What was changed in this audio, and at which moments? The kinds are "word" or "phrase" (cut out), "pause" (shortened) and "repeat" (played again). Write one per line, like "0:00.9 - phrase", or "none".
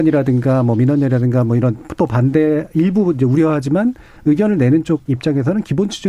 none